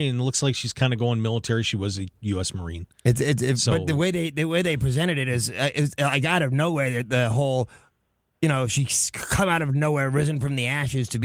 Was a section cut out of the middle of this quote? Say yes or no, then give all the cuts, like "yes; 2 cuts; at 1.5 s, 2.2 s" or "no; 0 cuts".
no; 0 cuts